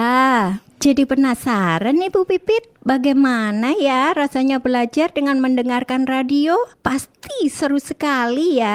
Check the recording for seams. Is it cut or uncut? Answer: uncut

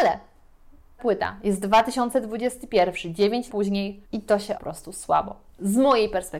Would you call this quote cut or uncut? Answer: cut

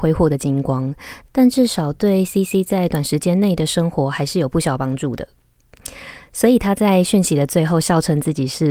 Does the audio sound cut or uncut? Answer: uncut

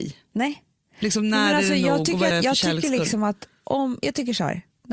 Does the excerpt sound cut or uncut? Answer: cut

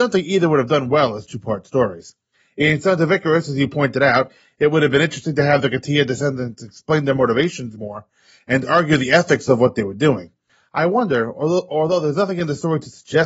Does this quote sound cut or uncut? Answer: uncut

